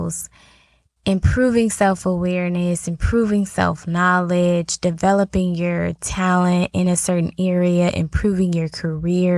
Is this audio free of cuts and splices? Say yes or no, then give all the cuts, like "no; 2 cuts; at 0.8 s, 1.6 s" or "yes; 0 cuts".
yes; 0 cuts